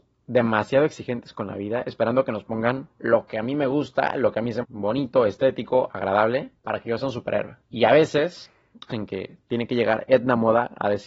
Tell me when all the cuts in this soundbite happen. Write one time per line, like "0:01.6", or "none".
0:02.9
0:04.6
0:06.6
0:07.6
0:08.9

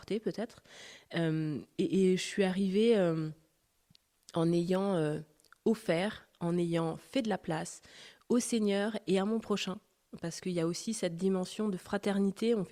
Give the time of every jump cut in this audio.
none

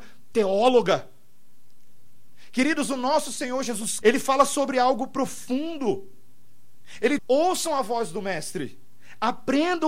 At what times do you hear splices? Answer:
0:04.0
0:07.2

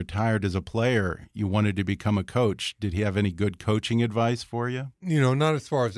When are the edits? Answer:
0:04.9

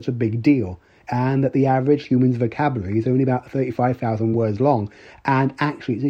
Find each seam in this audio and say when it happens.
none

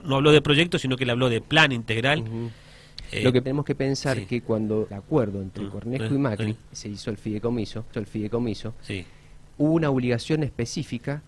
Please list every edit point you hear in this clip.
0:03.4
0:04.9
0:06.7
0:07.9

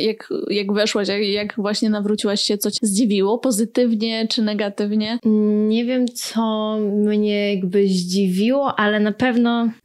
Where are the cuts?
0:02.8

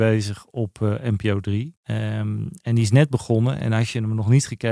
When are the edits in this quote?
0:01.8

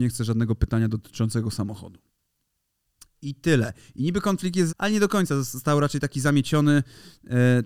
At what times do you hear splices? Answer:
0:04.7

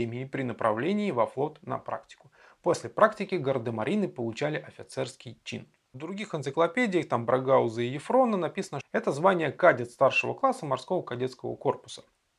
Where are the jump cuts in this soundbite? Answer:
0:08.8

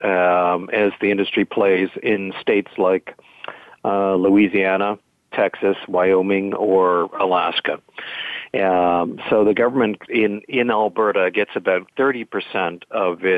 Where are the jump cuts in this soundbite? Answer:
none

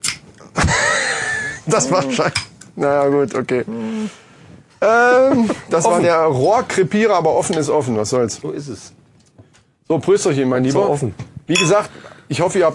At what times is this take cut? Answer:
none

